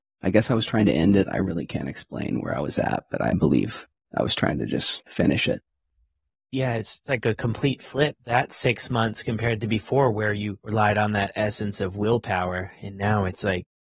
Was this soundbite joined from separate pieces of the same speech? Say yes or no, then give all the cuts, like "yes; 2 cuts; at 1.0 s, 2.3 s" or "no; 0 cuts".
no; 0 cuts